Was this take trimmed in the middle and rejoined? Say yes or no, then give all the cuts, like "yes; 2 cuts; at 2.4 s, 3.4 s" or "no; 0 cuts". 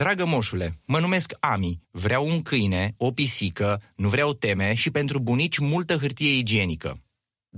yes; 1 cut; at 1.8 s